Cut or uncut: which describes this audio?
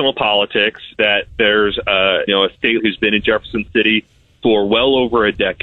cut